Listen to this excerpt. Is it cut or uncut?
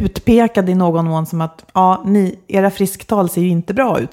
uncut